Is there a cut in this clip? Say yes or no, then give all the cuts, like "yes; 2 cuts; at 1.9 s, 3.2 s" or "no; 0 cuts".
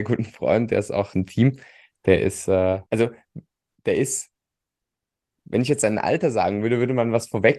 yes; 2 cuts; at 1.1 s, 2.9 s